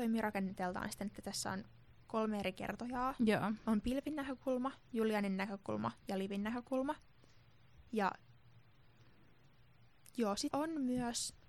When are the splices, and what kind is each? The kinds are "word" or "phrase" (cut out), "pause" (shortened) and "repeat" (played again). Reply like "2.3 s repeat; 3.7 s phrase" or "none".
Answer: 10.5 s word